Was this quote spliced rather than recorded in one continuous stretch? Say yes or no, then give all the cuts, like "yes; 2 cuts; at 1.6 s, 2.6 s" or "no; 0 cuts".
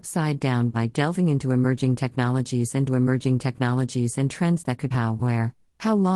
yes; 2 cuts; at 2.9 s, 4.9 s